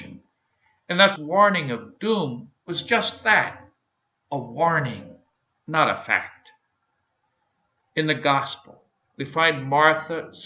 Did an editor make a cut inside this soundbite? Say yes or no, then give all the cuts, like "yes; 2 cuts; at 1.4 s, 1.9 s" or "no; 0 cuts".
yes; 1 cut; at 1.2 s